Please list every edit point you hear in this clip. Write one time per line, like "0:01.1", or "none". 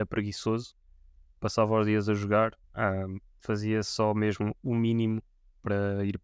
0:02.6